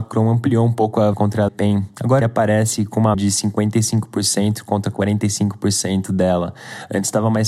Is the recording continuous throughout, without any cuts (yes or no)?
no